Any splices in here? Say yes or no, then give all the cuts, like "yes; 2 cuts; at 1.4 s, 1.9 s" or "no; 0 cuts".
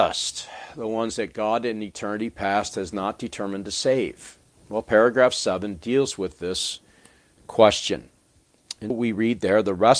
yes; 2 cuts; at 4.4 s, 8.9 s